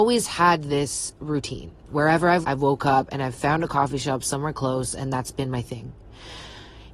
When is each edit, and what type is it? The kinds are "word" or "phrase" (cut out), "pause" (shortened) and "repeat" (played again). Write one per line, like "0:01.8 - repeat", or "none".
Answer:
0:02.4 - word